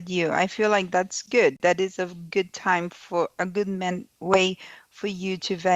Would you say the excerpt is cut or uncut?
uncut